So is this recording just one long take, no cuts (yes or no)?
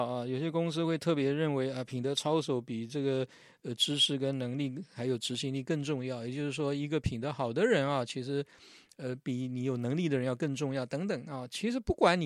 yes